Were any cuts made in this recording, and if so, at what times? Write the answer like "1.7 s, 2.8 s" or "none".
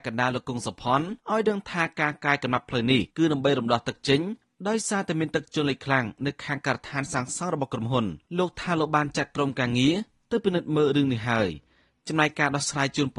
1.2 s, 3.1 s, 8.3 s